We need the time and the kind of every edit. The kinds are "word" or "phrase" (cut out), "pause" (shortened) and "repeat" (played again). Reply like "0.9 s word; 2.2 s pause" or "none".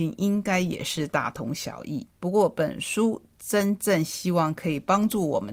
2.1 s pause